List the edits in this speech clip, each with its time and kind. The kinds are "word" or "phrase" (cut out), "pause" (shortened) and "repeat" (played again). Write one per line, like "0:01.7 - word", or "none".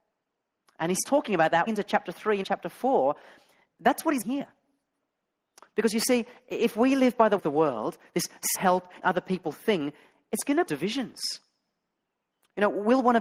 0:01.0 - word
0:01.7 - word
0:02.4 - word
0:04.2 - word
0:07.4 - word
0:08.5 - word
0:09.0 - word
0:10.7 - word

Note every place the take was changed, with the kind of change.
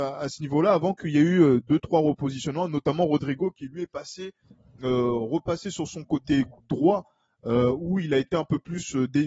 none

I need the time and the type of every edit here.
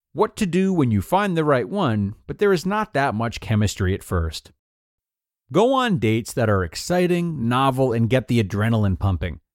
none

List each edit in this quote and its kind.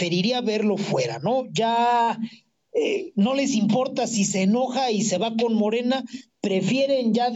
none

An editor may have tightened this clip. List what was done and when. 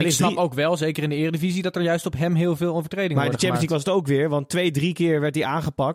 none

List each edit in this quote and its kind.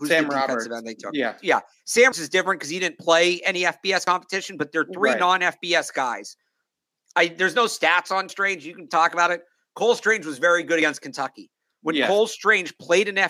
0:02.1 - word
0:08.3 - word
0:08.9 - word

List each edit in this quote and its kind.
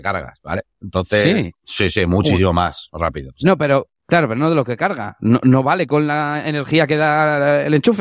none

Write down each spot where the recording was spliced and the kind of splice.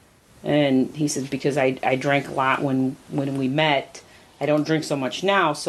none

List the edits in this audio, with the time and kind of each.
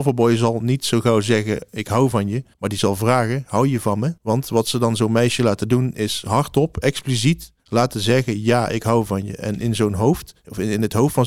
0:02.5 - pause
0:04.2 - pause
0:07.6 - pause

